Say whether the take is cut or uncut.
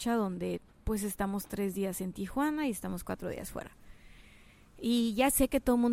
uncut